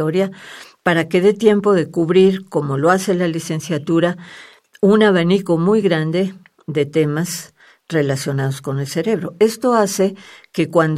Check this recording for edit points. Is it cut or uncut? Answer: uncut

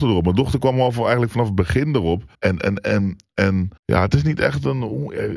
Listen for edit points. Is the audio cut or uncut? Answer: cut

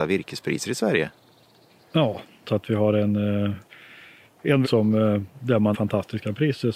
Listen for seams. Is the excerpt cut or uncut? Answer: cut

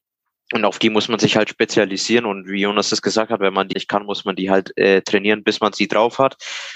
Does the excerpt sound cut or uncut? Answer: cut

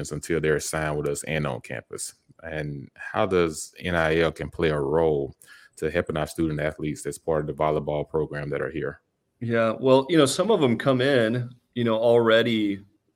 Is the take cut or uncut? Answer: uncut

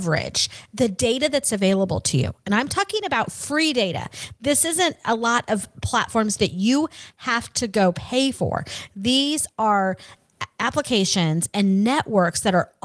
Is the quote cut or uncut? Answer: uncut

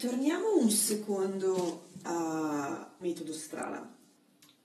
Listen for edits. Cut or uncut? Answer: cut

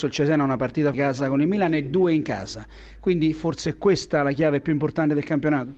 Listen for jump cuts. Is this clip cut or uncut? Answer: cut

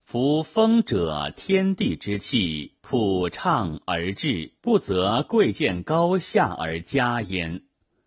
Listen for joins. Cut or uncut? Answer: cut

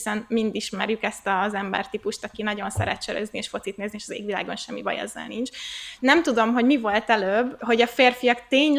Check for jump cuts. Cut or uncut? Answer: uncut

